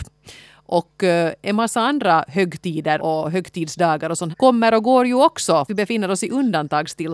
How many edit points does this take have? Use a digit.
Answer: 3